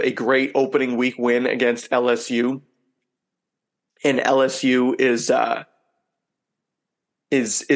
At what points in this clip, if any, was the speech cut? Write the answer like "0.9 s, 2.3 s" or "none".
none